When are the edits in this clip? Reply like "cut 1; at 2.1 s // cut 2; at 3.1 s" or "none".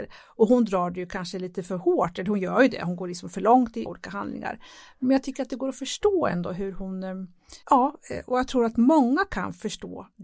cut 1; at 3.9 s // cut 2; at 7.6 s // cut 3; at 8.7 s